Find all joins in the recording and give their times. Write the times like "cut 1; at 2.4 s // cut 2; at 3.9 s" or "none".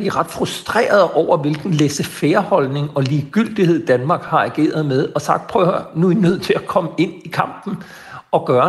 none